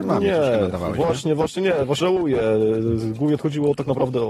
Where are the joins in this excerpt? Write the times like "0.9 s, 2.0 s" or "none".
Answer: 2.0 s, 3.4 s